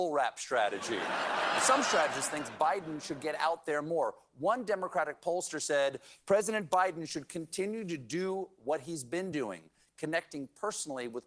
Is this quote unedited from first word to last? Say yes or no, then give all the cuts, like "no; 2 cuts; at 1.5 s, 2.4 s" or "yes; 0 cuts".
yes; 0 cuts